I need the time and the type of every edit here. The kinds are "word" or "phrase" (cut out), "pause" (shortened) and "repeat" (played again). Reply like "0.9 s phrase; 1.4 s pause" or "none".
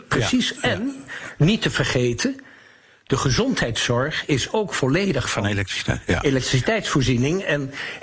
5.2 s word